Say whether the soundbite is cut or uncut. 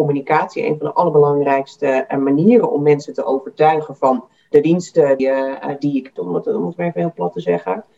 cut